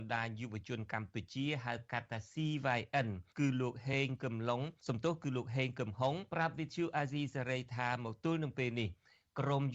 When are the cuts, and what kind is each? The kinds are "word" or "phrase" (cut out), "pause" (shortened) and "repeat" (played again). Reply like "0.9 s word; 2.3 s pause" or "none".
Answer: 3.3 s pause; 4.8 s pause; 6.3 s pause